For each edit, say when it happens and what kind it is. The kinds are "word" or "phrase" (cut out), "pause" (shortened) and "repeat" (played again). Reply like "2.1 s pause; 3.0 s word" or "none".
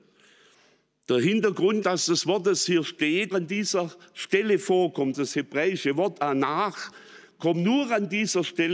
1.8 s word; 3.3 s word; 5.1 s word

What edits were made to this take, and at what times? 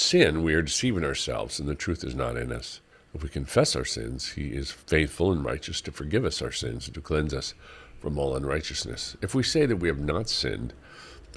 2.9 s pause; 4.8 s pause

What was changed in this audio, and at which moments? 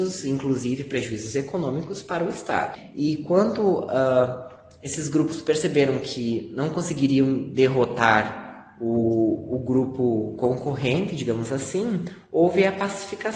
none

